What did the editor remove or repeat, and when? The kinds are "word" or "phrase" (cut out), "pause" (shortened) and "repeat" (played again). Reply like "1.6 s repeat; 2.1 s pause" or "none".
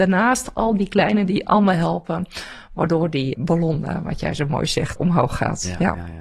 1.3 s word; 3.3 s word; 5.0 s word